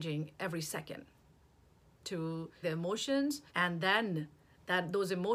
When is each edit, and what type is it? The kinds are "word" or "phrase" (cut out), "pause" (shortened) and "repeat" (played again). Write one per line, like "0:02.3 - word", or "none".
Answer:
0:01.9 - phrase
0:02.6 - word
0:03.5 - pause